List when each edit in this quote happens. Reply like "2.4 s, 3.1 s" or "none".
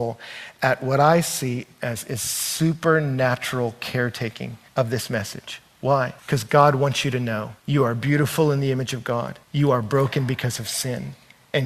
4.7 s, 6.2 s, 7.6 s, 9.4 s